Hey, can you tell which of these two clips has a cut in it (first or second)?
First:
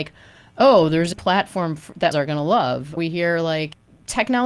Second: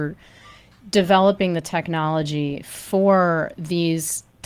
first